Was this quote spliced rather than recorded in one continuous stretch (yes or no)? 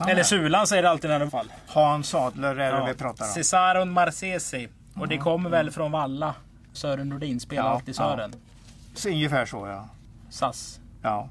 yes